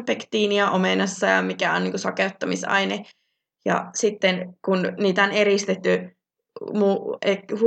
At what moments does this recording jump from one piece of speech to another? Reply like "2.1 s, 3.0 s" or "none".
none